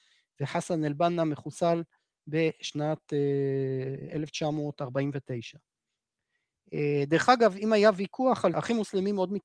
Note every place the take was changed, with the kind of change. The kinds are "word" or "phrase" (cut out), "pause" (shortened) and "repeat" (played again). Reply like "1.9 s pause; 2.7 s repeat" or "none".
8.5 s word